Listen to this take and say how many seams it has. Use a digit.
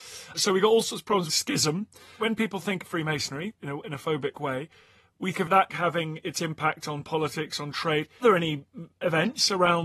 6